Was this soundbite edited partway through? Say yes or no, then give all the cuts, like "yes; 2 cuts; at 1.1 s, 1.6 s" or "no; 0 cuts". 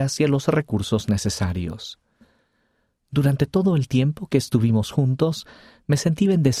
no; 0 cuts